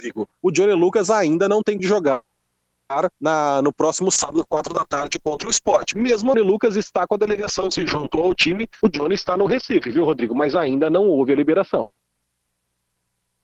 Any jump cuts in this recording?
yes; 3 cuts; at 1.8 s, 3.1 s, 6.3 s

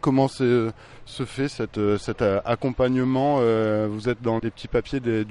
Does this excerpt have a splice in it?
yes; 1 cut; at 4.4 s

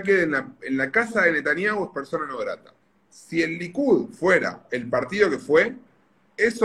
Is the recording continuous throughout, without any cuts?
no; 1 cut; at 2.8 s

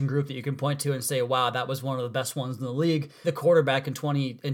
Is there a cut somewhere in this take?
yes; 1 cut; at 3.2 s

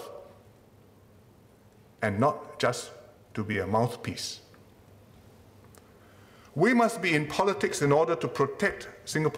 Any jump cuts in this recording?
no; 0 cuts

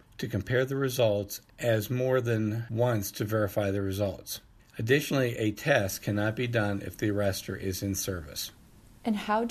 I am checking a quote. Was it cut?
no; 0 cuts

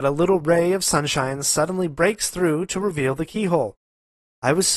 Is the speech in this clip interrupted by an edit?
no; 0 cuts

